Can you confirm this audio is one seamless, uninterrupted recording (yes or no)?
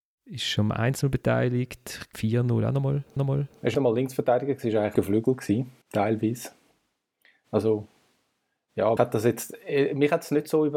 no